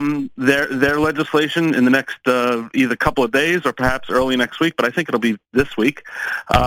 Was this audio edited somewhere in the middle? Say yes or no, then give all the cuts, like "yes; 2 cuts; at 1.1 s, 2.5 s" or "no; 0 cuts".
yes; 1 cut; at 5.5 s